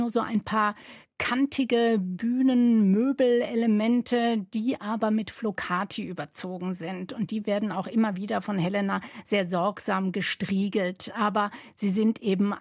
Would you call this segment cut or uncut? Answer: uncut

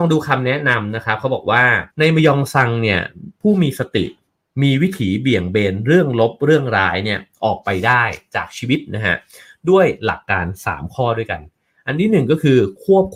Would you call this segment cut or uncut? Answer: cut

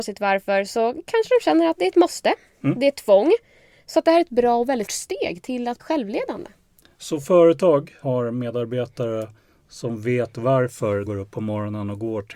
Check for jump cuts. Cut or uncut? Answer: cut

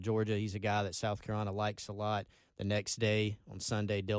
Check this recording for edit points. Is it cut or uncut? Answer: uncut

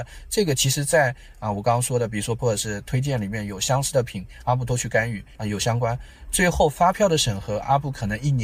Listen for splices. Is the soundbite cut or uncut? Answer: cut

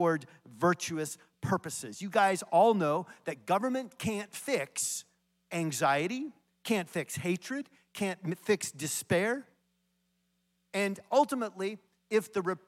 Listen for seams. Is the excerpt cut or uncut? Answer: uncut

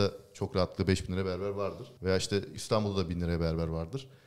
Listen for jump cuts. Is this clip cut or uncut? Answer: cut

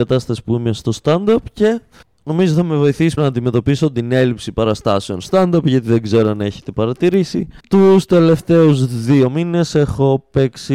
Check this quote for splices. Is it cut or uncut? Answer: cut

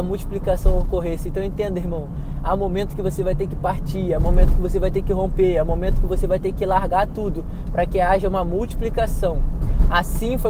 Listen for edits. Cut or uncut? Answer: uncut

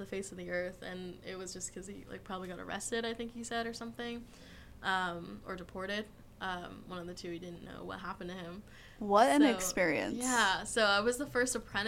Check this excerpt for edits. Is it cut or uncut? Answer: uncut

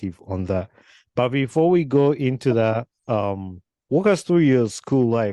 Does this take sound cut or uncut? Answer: uncut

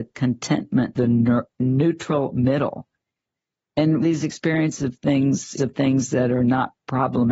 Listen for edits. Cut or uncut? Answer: cut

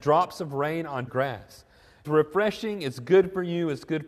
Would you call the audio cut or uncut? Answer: cut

